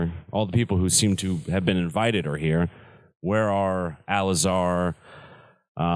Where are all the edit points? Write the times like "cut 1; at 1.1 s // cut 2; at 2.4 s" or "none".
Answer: none